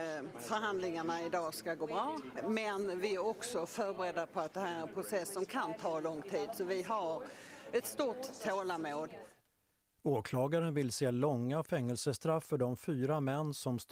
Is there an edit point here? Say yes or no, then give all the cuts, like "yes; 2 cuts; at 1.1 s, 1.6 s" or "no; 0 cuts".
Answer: no; 0 cuts